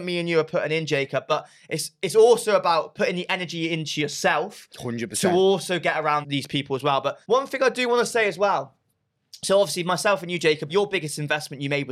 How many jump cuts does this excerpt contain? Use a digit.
3